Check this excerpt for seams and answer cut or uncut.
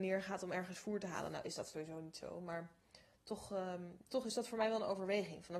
cut